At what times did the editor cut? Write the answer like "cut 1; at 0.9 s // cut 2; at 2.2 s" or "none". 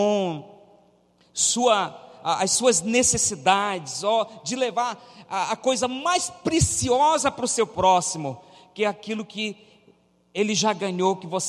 none

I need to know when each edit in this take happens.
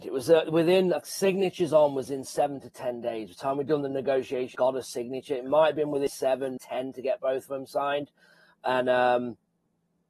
cut 1; at 1.0 s // cut 2; at 4.5 s // cut 3; at 6.6 s

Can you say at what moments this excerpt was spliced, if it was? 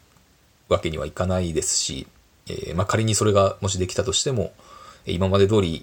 cut 1; at 2.1 s

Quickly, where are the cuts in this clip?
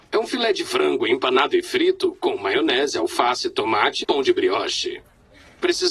cut 1; at 4.0 s

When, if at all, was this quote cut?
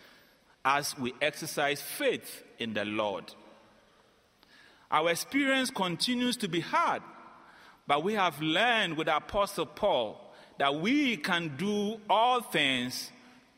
none

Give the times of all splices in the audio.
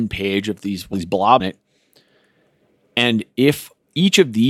cut 1; at 0.9 s // cut 2; at 1.4 s

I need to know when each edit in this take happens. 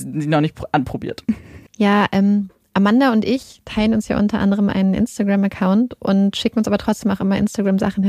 cut 1; at 1.7 s

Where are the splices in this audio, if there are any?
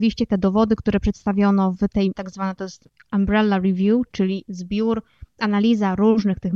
cut 1; at 2.1 s

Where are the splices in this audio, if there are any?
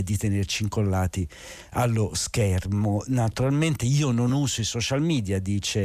none

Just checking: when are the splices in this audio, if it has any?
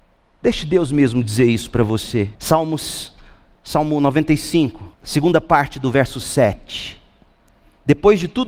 cut 1; at 2.4 s // cut 2; at 4.9 s

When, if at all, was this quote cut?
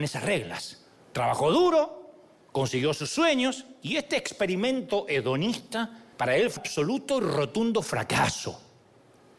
cut 1; at 1.0 s // cut 2; at 6.1 s // cut 3; at 6.6 s

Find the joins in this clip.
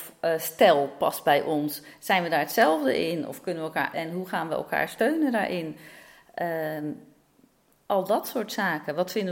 cut 1; at 3.9 s

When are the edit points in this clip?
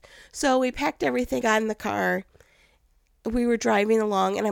cut 1; at 1.4 s

